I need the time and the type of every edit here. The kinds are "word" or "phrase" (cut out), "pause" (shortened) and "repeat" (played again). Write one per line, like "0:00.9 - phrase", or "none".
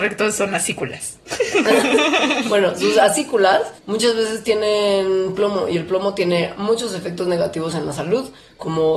0:03.8 - pause